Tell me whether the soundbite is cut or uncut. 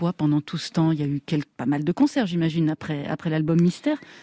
cut